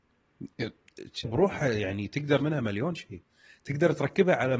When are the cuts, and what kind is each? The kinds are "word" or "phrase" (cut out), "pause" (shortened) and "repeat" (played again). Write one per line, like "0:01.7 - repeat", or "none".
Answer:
0:01.2 - word
0:02.4 - word